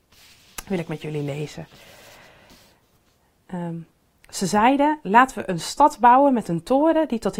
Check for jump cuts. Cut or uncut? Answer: uncut